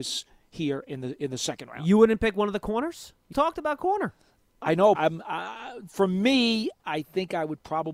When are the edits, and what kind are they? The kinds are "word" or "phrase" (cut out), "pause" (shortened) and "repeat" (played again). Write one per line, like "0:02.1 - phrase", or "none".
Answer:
0:03.3 - word
0:04.9 - word
0:06.8 - word

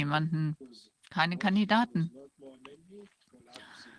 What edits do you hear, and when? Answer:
none

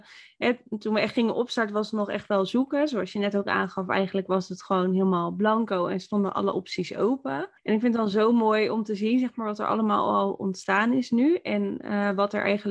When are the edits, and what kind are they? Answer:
0:07.6 - pause

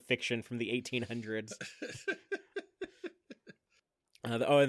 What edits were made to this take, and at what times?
none

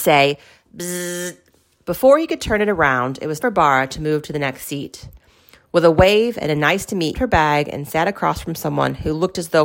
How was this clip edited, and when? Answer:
0:03.4 - word
0:07.1 - phrase

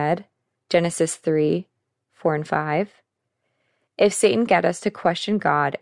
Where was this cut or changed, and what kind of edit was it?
0:04.5 - word

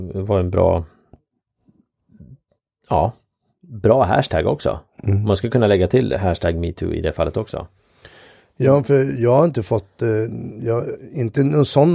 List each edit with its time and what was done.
none

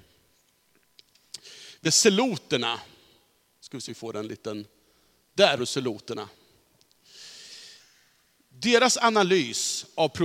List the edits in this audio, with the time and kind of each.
0:01.8 - word
0:03.9 - word
0:05.6 - word

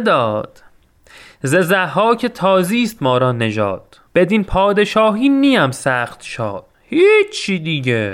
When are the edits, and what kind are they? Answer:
0:04.1 - pause
0:06.7 - pause

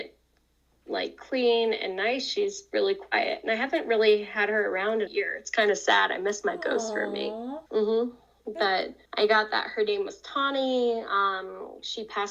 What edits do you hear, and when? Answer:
0:05.1 - phrase
0:07.7 - pause
0:09.0 - pause

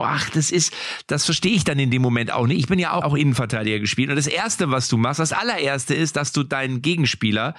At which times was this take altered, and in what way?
0:03.0 - phrase

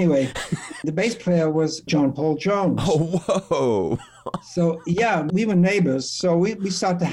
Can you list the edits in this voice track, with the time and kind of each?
none

